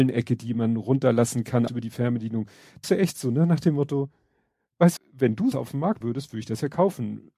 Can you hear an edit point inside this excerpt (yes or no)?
yes